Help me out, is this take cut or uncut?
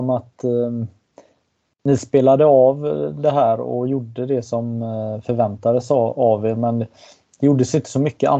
uncut